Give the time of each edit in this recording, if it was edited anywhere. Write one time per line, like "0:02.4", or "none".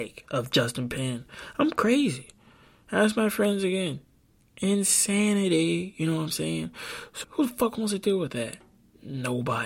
0:07.2